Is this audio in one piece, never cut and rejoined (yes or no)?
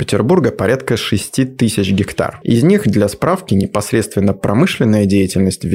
yes